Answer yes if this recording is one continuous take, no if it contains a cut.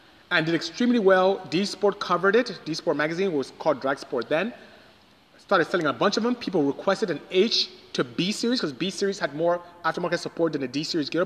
yes